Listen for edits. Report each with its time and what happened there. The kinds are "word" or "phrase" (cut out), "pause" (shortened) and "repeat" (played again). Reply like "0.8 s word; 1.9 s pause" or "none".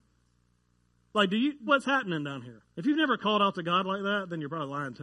1.7 s phrase; 2.7 s pause